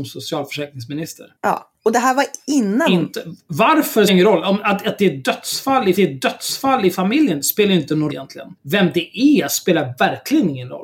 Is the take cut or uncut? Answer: cut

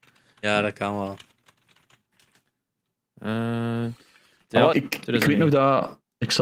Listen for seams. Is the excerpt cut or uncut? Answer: cut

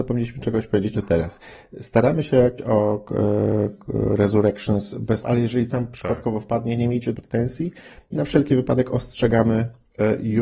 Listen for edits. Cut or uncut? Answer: cut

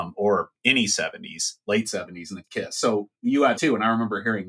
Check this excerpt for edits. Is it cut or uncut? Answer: cut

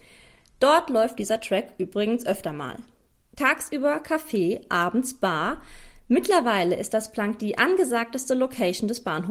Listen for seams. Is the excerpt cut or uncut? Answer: uncut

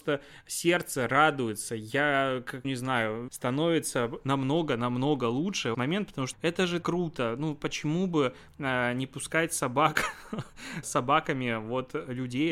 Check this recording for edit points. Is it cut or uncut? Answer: cut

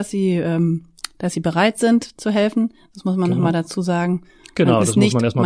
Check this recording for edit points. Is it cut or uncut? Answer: uncut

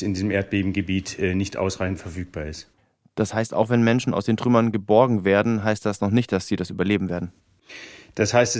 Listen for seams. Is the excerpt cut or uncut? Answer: uncut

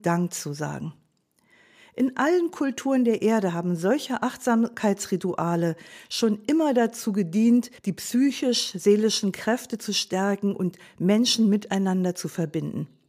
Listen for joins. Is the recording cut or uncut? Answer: cut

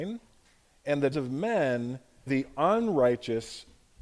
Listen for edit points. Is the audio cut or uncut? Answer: cut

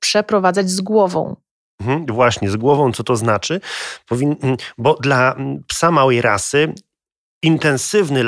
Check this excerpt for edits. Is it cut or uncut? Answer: uncut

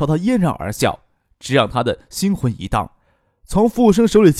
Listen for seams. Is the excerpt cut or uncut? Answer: uncut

